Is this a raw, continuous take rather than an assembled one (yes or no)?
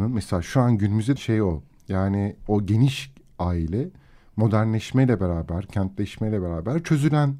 no